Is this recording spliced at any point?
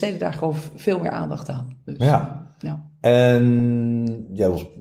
no; 0 cuts

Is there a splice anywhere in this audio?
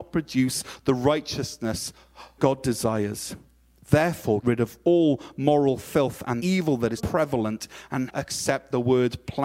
yes; 5 cuts; at 2.4 s, 4.4 s, 6.4 s, 7.0 s, 8.1 s

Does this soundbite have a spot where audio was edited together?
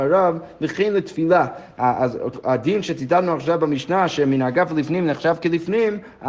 no; 0 cuts

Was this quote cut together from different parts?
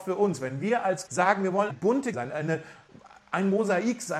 yes; 3 cuts; at 1.1 s, 1.7 s, 2.1 s

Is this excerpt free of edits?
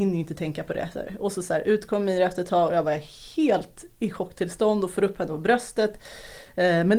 yes; 0 cuts

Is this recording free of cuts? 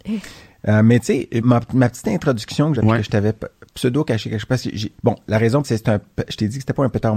no; 4 cuts; at 1.4 s, 2.8 s, 5.0 s, 5.6 s

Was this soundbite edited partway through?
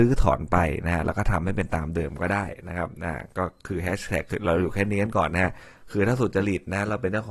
no; 0 cuts

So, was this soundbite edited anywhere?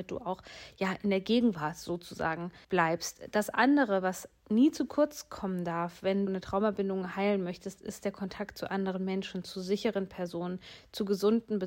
yes; 2 cuts; at 2.6 s, 6.3 s

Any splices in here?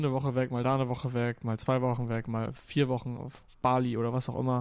no; 0 cuts

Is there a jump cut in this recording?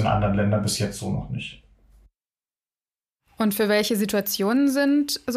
no; 0 cuts

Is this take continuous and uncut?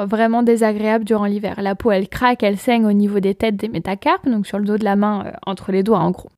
yes; 0 cuts

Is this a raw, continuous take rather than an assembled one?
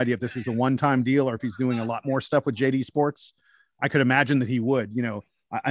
yes; 0 cuts

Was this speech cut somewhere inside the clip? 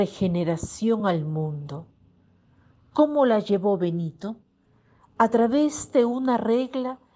no; 0 cuts

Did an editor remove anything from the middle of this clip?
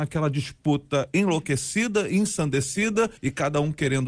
yes; 1 cut; at 3.2 s

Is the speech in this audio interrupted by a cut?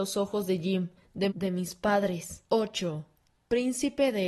yes; 2 cuts; at 1.3 s, 2.5 s

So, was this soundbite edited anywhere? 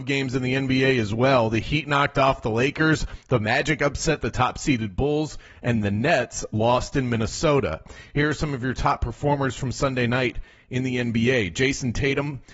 no; 0 cuts

